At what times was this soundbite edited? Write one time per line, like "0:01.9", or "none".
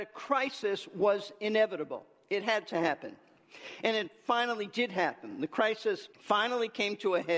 0:06.1